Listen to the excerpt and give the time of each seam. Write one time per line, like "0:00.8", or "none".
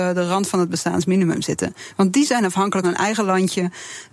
0:02.8

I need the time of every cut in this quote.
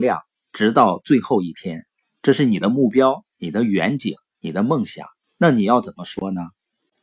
0:05.2

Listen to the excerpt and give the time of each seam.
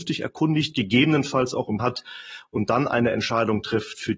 0:01.8

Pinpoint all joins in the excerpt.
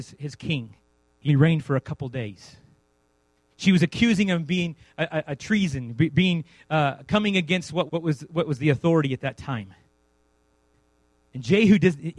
0:01.3
0:07.9

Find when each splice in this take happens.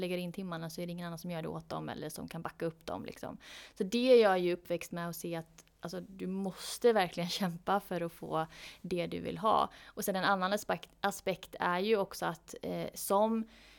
none

